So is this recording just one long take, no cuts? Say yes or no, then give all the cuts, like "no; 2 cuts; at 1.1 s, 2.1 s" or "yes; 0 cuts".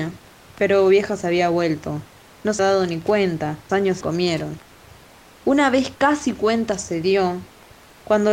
no; 3 cuts; at 2.6 s, 3.7 s, 4.0 s